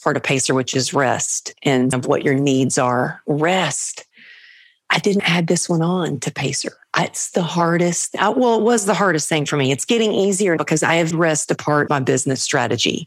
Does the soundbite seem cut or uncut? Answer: cut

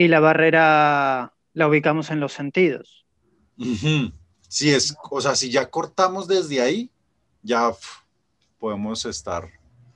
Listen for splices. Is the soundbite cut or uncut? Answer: uncut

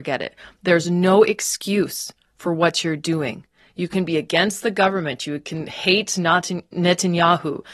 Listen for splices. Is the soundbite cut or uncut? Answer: uncut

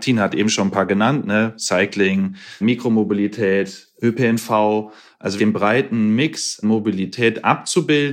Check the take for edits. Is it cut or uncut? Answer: cut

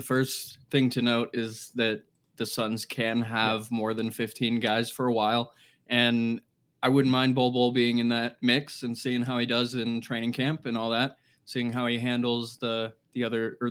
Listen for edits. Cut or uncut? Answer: uncut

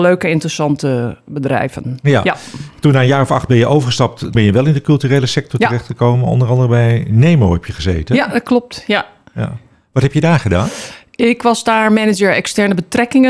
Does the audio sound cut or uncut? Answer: cut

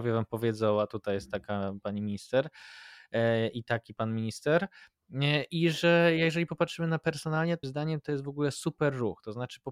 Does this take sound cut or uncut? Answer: cut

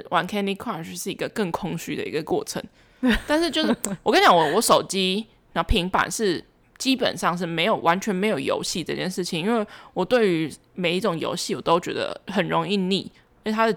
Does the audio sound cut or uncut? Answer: uncut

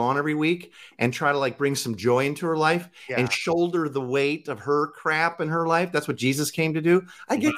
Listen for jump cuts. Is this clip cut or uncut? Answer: uncut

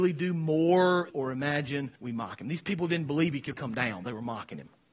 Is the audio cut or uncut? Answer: cut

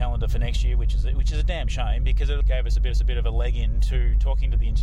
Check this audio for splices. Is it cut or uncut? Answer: cut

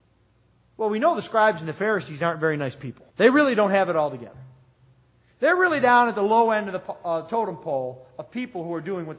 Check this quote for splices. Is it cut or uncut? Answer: cut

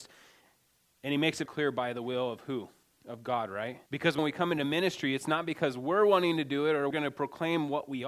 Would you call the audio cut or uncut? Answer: cut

